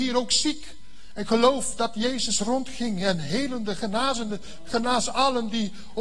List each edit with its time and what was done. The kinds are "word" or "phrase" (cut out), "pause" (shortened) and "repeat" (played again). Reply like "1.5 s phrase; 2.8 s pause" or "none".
none

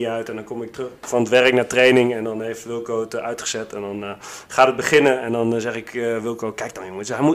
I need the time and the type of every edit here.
none

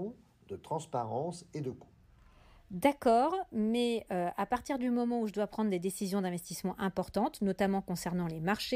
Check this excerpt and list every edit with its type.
none

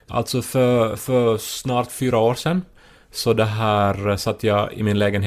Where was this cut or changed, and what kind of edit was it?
none

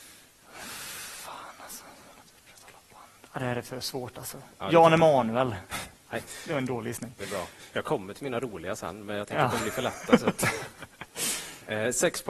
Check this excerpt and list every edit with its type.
none

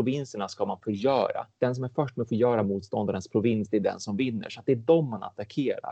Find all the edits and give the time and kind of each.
none

